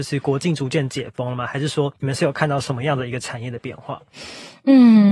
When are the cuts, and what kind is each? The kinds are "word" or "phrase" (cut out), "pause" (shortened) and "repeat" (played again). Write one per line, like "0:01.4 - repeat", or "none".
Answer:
0:02.0 - pause

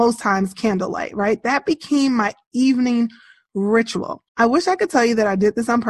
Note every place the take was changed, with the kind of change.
0:04.3 - pause

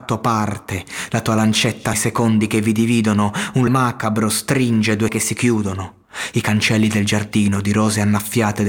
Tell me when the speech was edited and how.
0:01.9 - word
0:03.7 - word
0:05.1 - word

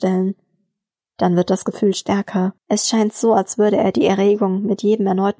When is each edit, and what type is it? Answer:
0:02.6 - pause

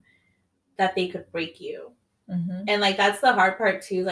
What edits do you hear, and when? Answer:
none

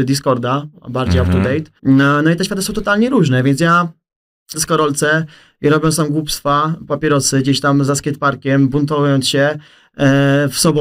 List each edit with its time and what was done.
0:01.8 - pause
0:04.5 - phrase
0:06.9 - word
0:07.9 - word

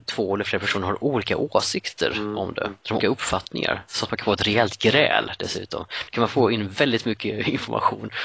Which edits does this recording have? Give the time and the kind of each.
0:03.0 - word

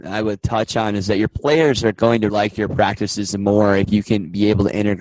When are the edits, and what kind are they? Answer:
0:02.3 - word

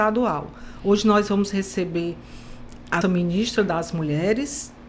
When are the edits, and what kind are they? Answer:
0:03.0 - word

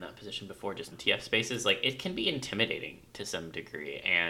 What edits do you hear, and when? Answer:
0:00.9 - word

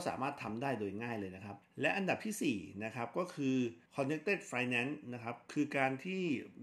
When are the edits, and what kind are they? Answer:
0:01.6 - pause
0:03.9 - pause

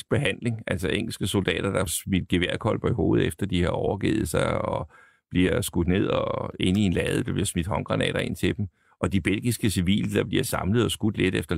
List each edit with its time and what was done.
0:01.9 - word

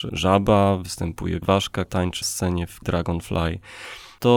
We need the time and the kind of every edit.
0:01.4 - word
0:01.9 - word
0:02.2 - word
0:02.8 - word

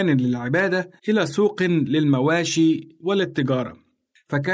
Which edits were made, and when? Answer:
0:01.0 - pause

